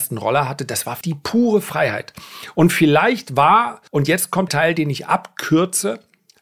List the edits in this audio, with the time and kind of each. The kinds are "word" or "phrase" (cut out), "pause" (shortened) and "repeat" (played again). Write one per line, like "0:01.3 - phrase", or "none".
0:01.0 - word
0:03.9 - pause
0:04.5 - word